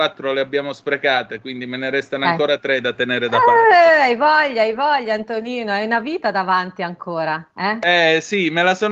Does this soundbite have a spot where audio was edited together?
no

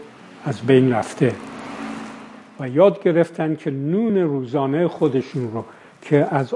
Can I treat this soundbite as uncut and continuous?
yes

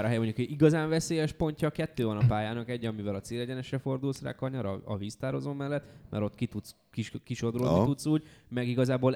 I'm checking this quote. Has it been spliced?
no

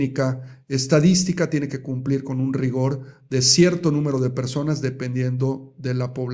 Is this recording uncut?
yes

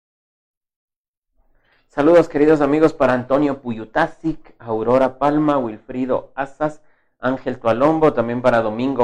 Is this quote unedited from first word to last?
yes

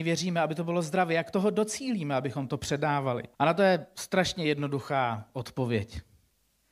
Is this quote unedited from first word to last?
no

